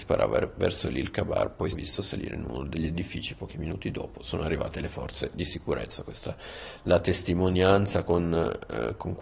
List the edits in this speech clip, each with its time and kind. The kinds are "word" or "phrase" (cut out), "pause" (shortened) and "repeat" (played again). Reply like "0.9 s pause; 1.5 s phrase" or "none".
1.7 s phrase